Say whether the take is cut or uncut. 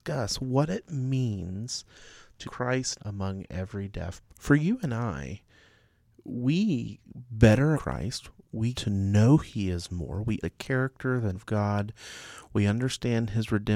cut